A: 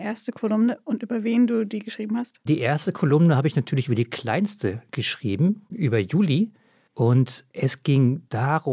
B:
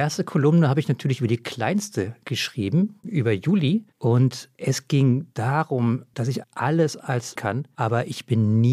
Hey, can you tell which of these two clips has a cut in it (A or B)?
B